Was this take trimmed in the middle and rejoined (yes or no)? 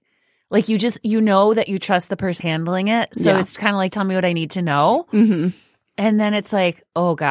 yes